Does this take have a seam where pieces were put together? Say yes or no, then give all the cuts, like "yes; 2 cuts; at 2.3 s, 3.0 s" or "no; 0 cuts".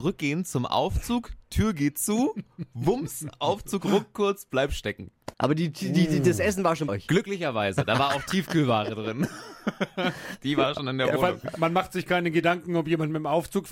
yes; 2 cuts; at 5.3 s, 6.9 s